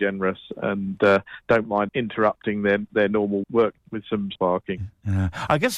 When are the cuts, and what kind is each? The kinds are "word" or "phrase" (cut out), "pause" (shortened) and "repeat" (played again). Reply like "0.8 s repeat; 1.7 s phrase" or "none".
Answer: 1.9 s word; 3.4 s word; 3.8 s phrase; 4.3 s phrase